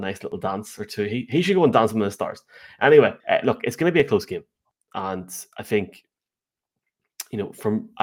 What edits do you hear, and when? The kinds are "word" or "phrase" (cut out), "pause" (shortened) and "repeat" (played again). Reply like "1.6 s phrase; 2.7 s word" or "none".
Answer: 3.2 s pause